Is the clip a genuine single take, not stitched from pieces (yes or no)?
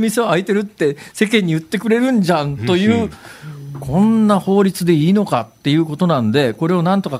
yes